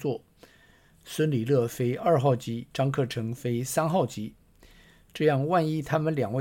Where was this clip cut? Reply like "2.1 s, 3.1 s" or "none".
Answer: 2.7 s